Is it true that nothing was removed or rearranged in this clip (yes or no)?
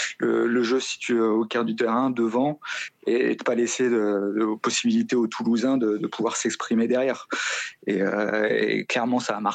yes